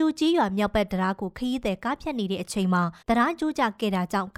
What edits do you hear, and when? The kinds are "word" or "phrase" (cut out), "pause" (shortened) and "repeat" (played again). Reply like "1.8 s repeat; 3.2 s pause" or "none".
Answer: 3.0 s pause